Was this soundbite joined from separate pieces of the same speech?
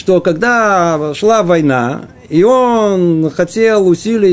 no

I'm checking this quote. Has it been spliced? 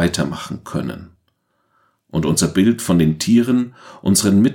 no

